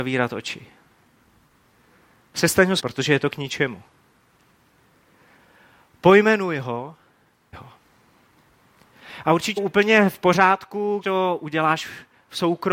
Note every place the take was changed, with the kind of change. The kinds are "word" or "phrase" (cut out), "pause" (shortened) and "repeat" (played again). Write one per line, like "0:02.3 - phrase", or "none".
0:02.8 - word
0:07.5 - word
0:09.6 - word
0:11.0 - word